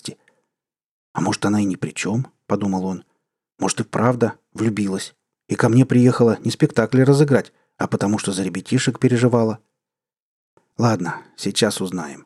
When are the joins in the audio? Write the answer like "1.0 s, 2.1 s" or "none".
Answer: none